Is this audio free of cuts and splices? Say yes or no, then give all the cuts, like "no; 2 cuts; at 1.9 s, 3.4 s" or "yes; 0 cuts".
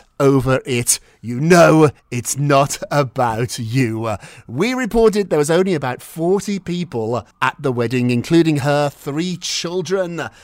no; 2 cuts; at 2.0 s, 7.3 s